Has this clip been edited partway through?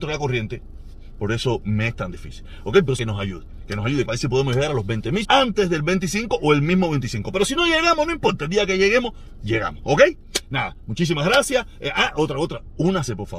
yes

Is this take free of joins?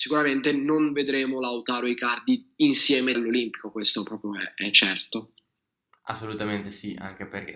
no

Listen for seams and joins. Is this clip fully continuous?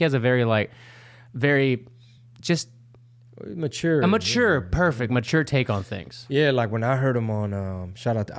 yes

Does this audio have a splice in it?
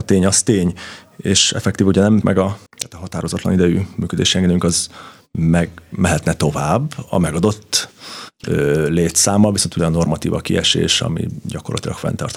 yes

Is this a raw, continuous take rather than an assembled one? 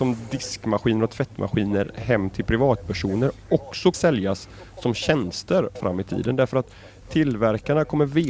no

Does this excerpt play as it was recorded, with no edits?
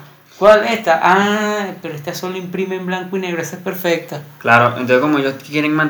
yes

